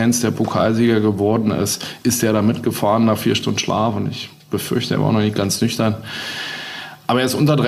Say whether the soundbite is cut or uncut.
uncut